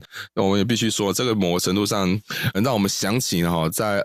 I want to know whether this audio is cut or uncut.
cut